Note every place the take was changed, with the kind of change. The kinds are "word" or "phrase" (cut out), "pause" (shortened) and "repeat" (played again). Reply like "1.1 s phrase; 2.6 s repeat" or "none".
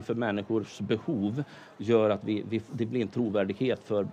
none